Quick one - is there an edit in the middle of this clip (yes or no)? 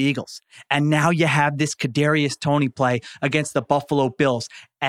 no